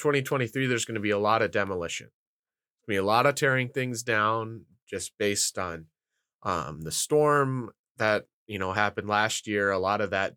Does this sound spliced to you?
no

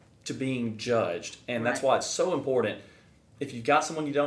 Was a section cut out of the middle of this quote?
no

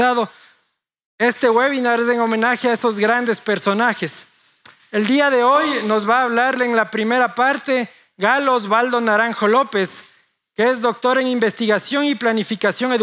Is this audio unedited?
yes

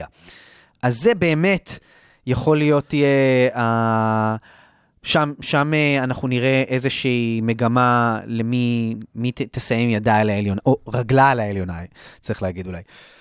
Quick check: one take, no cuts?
yes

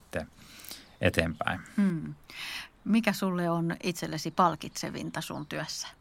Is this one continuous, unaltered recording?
yes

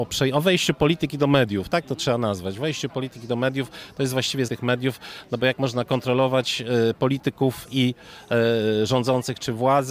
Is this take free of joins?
no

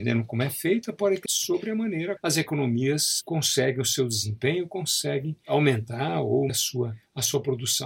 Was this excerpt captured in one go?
no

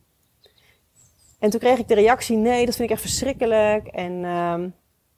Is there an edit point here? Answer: no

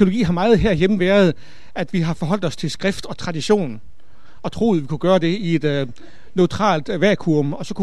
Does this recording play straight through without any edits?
yes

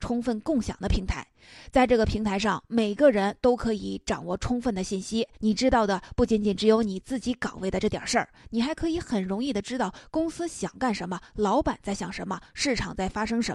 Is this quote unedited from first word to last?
no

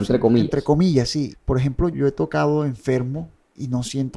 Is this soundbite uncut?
no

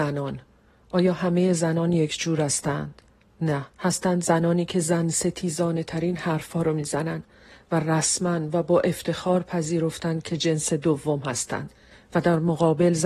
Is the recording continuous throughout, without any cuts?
no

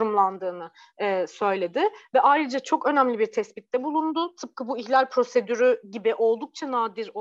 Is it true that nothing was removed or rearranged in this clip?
yes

